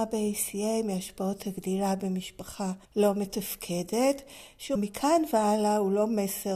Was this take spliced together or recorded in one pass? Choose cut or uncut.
cut